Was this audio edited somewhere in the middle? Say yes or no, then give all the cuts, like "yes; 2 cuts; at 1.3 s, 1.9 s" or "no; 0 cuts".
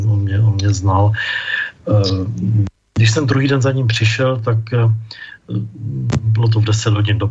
no; 0 cuts